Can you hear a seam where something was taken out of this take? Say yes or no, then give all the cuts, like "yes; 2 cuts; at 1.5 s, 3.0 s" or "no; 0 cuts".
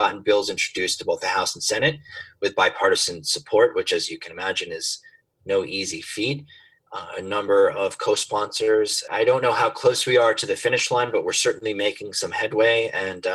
no; 0 cuts